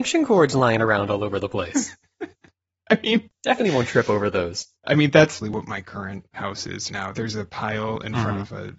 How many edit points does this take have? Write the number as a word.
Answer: five